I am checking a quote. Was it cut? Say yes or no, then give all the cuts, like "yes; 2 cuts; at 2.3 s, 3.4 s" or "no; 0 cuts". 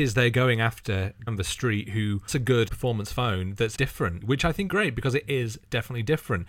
yes; 6 cuts; at 1.3 s, 2.3 s, 2.7 s, 3.7 s, 4.2 s, 4.7 s